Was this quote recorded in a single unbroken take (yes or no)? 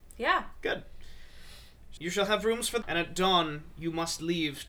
no